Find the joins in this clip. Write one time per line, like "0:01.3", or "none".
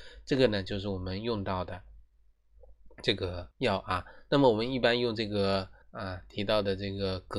0:03.5
0:05.8